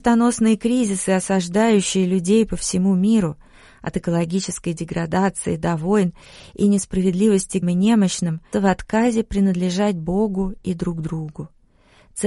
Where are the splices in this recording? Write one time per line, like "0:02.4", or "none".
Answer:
0:07.6
0:08.5